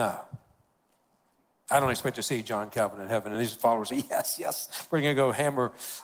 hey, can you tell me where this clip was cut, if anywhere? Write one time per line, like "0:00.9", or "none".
none